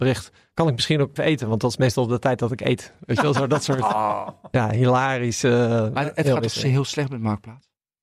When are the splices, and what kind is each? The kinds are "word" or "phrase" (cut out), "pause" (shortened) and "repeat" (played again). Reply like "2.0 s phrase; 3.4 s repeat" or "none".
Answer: 1.2 s word